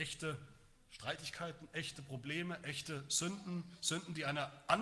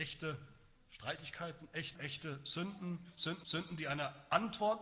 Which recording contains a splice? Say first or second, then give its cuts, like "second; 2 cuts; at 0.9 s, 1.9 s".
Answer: second; 2 cuts; at 1.9 s, 3.4 s